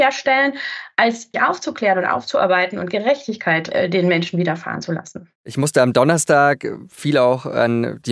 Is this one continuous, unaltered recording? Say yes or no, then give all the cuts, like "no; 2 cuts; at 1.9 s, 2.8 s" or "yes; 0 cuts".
no; 2 cuts; at 1.3 s, 5.4 s